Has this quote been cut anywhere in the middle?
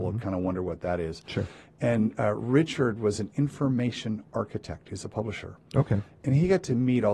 no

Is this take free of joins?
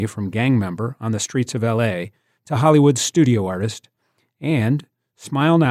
yes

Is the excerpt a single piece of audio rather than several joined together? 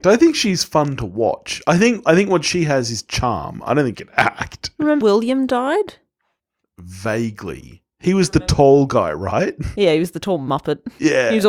no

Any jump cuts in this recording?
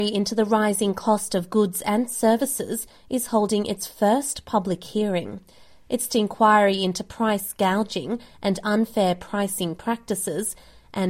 yes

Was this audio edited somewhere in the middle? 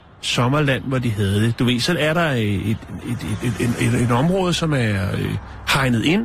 no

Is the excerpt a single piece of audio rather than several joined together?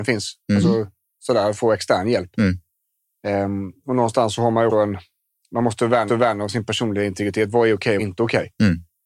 no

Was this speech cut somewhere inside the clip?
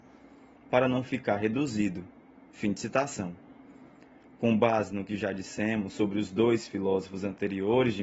no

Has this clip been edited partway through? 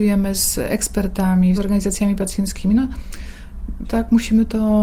yes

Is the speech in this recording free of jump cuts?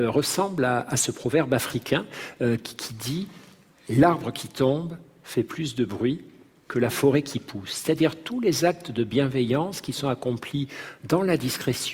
yes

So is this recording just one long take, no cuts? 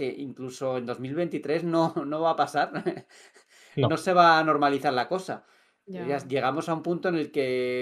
yes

